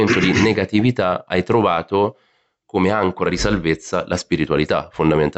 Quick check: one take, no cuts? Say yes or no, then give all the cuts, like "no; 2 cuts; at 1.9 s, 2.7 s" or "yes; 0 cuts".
yes; 0 cuts